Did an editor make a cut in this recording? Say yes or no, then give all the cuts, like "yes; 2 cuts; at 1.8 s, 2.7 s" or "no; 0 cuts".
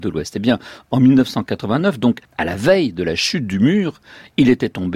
yes; 1 cut; at 2.2 s